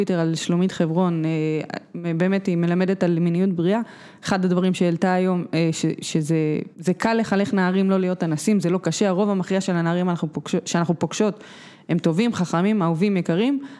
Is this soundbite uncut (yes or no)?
no